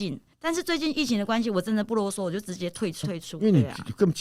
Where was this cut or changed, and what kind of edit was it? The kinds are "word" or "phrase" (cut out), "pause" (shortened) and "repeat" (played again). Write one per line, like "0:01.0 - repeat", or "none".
0:03.0 - word